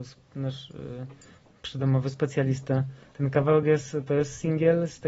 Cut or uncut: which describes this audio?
uncut